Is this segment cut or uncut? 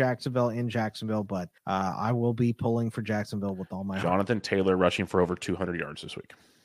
cut